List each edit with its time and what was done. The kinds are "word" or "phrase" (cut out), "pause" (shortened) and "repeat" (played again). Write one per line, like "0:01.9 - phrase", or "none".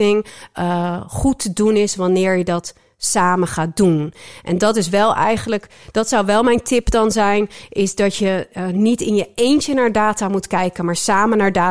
none